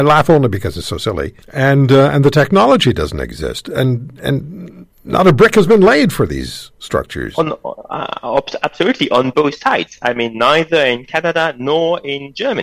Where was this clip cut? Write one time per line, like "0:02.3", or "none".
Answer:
0:01.4
0:04.9

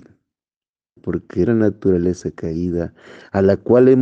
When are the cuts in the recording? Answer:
0:01.0
0:01.5

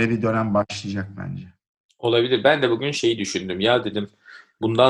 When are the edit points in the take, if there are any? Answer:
none

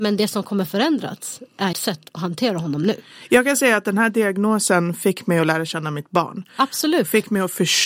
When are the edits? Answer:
0:01.7

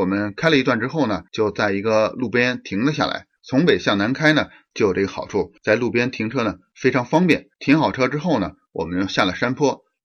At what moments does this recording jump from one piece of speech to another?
0:01.3
0:03.4
0:05.6
0:07.5

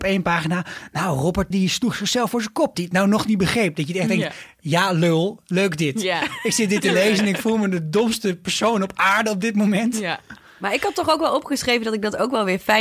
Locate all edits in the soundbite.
0:01.5
0:02.7

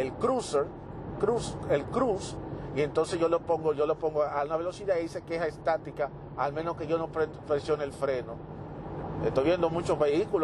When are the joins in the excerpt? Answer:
none

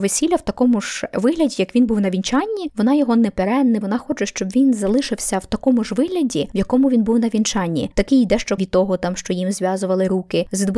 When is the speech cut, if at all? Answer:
0:03.8
0:08.6

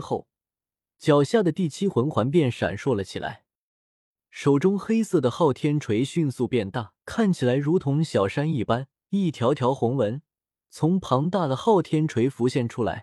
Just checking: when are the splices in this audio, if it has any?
0:07.0
0:09.0

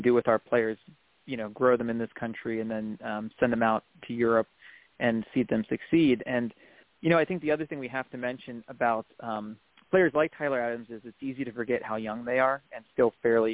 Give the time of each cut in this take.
none

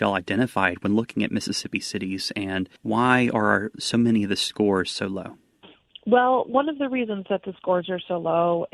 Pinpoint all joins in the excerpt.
0:02.8

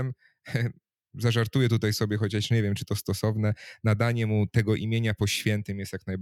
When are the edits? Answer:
none

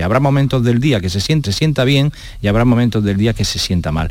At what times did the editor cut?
0:01.4

